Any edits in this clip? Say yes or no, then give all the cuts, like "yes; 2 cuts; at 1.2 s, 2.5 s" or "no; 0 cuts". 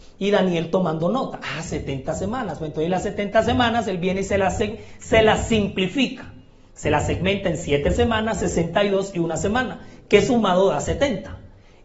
no; 0 cuts